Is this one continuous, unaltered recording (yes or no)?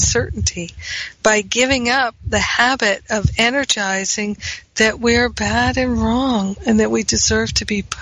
yes